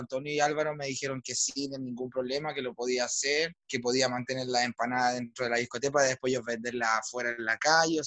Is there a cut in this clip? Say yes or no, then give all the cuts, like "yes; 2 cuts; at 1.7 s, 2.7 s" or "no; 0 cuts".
no; 0 cuts